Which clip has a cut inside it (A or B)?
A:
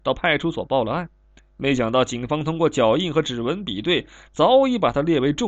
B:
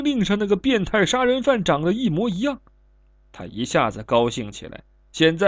A